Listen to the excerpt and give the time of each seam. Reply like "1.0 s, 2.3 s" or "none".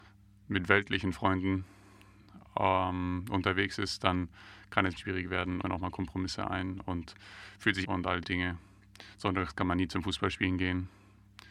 5.0 s, 5.6 s, 7.8 s, 8.2 s